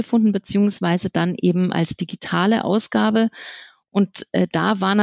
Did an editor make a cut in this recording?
no; 0 cuts

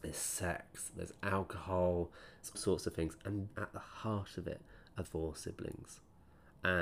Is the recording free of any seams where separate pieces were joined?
no; 3 cuts; at 2.5 s, 3.5 s, 5.0 s

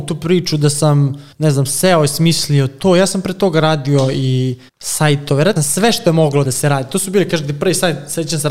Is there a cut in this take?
yes; 4 cuts; at 1.3 s, 4.7 s, 5.6 s, 6.4 s

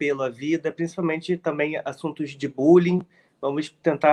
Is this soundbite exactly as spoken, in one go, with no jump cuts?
yes; 0 cuts

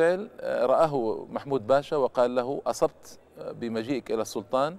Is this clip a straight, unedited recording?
yes; 0 cuts

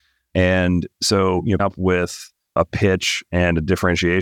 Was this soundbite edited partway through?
yes; 1 cut; at 1.6 s

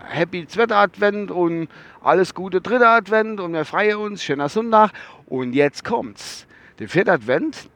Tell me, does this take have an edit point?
no; 0 cuts

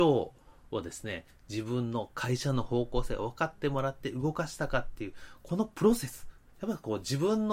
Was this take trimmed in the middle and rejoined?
no; 0 cuts

